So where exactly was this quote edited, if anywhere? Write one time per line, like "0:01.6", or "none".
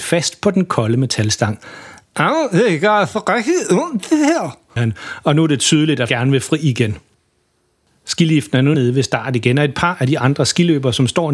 0:04.8
0:06.1
0:08.7